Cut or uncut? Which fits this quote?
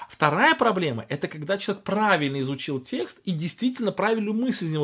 uncut